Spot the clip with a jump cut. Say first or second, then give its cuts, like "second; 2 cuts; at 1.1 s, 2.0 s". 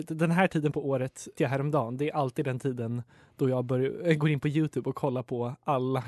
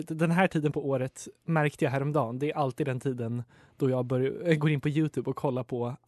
first; 1 cut; at 1.4 s